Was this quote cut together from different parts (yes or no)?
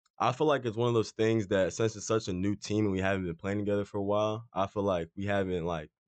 no